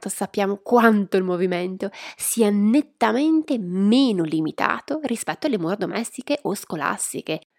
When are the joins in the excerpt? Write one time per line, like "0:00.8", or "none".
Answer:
none